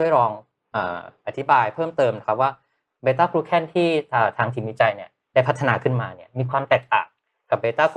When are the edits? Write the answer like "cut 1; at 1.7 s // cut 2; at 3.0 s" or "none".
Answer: none